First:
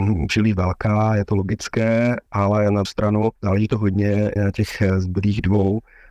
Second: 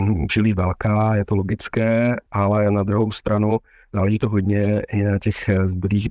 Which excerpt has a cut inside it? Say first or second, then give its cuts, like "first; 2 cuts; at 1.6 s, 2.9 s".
first; 3 cuts; at 2.8 s, 3.4 s, 4.4 s